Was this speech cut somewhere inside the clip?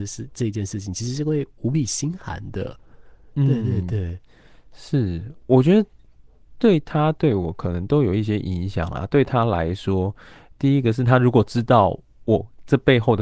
no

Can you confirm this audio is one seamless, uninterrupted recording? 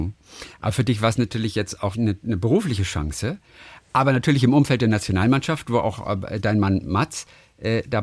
no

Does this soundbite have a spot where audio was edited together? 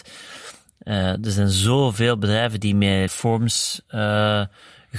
yes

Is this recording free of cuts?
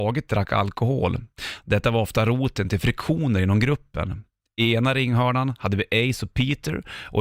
yes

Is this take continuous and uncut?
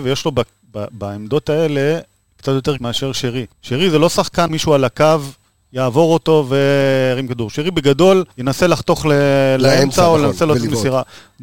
no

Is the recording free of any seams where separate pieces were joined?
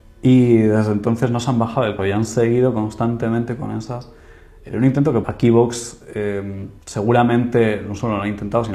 no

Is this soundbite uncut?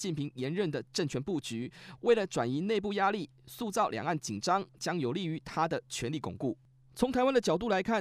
yes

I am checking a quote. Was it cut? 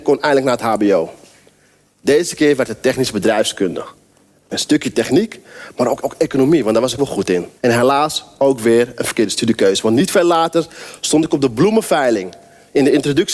yes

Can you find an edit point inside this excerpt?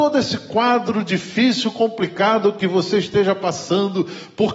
no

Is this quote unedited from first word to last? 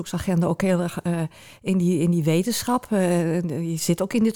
yes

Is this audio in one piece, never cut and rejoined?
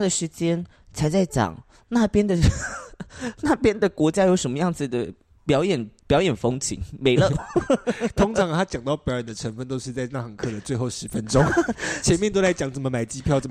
no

